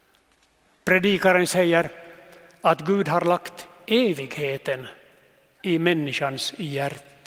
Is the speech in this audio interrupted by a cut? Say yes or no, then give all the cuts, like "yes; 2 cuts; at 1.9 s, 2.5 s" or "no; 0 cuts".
no; 0 cuts